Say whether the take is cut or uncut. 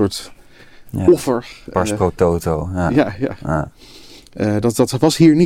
uncut